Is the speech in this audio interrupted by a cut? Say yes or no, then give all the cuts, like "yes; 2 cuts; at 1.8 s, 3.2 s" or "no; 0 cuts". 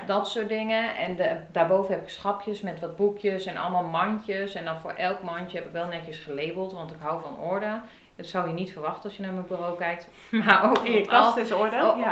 no; 0 cuts